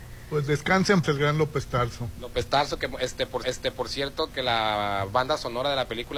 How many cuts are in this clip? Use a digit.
3